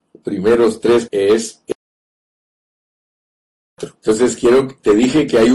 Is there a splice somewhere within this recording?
yes; 2 cuts; at 1.1 s, 4.0 s

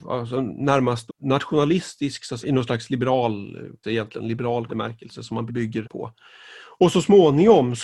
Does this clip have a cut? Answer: yes; 6 cuts; at 1.1 s, 2.4 s, 3.8 s, 4.7 s, 5.5 s, 5.8 s

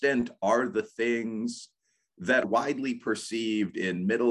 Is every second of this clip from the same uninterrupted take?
no; 1 cut; at 2.4 s

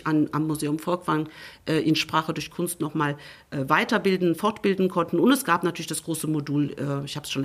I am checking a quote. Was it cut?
no; 0 cuts

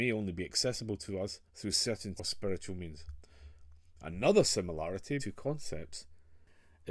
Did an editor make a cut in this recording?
yes; 3 cuts; at 1.5 s, 2.2 s, 5.2 s

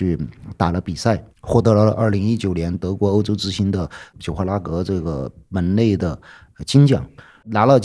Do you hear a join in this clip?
yes; 1 cut; at 1.3 s

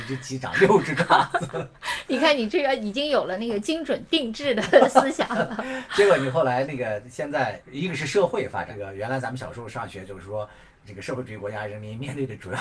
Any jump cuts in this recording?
no; 0 cuts

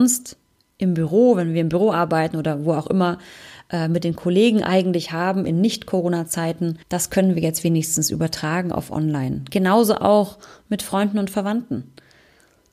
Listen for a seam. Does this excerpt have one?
yes; 1 cut; at 6.8 s

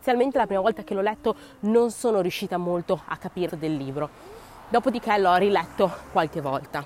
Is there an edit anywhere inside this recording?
yes; 1 cut; at 3.5 s

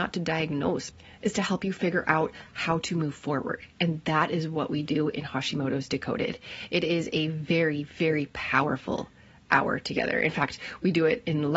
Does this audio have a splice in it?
no; 0 cuts

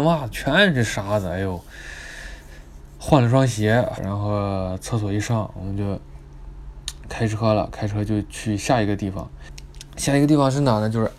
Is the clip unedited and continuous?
no; 1 cut; at 4.0 s

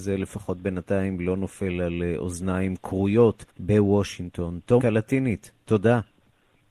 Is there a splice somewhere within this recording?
yes; 2 cuts; at 3.5 s, 4.8 s

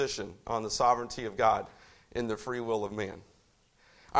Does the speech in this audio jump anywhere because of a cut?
no; 0 cuts

